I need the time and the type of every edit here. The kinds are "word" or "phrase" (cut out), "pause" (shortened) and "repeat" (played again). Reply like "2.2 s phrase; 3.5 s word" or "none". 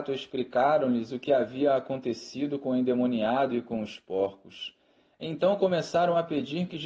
none